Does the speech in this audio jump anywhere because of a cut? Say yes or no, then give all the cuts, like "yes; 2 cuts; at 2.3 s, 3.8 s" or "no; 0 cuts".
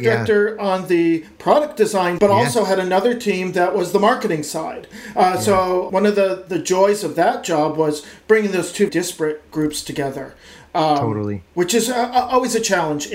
yes; 3 cuts; at 2.2 s, 5.9 s, 8.9 s